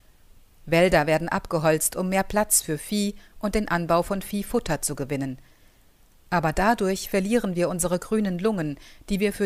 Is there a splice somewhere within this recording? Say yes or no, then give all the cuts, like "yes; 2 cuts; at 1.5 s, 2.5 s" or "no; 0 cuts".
no; 0 cuts